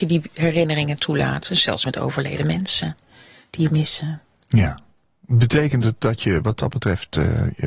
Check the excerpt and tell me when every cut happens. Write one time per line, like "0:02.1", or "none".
0:03.7